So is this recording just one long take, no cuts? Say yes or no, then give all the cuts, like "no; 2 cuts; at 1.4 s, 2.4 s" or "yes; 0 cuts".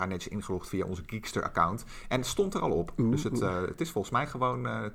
yes; 0 cuts